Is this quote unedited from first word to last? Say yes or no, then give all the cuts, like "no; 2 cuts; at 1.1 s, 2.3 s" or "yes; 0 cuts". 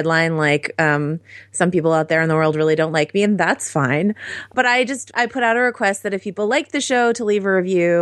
yes; 0 cuts